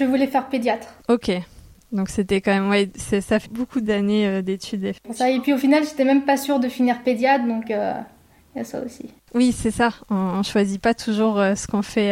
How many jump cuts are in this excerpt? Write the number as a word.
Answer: one